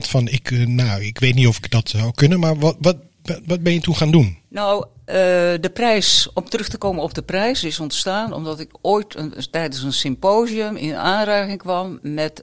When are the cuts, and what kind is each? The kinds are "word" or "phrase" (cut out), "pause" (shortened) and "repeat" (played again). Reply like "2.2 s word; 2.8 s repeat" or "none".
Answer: 4.4 s pause